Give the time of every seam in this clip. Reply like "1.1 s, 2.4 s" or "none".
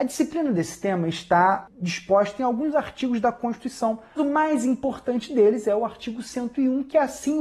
4.2 s

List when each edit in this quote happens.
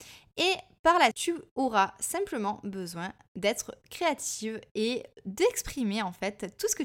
1.1 s

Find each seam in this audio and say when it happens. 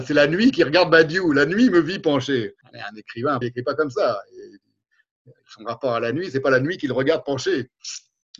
2.6 s, 3.4 s, 5.4 s

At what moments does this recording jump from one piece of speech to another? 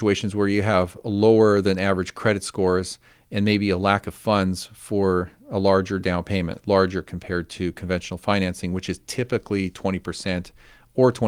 none

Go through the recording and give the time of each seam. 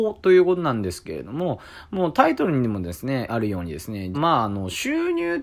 3.3 s, 4.1 s

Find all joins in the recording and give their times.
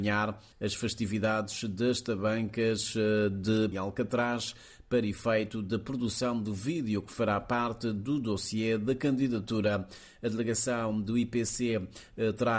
3.7 s

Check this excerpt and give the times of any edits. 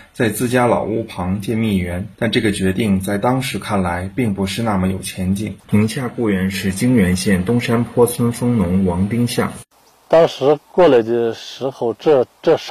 2.1 s, 5.6 s, 10.6 s

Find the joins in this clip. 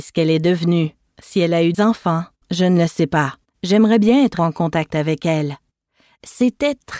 1.7 s, 2.4 s, 3.5 s, 4.4 s

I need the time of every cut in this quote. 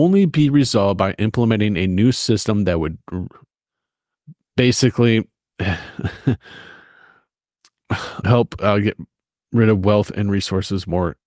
8.2 s

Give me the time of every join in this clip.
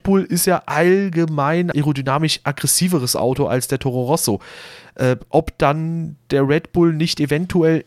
1.7 s

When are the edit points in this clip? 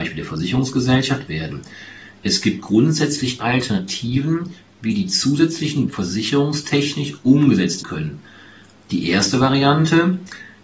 1.3 s, 3.4 s, 5.9 s, 7.8 s

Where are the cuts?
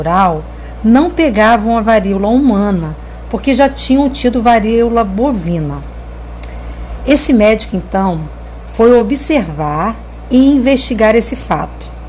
none

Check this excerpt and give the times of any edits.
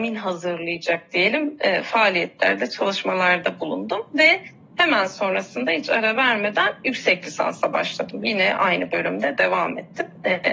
none

